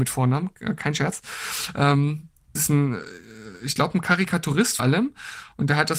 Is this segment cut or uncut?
cut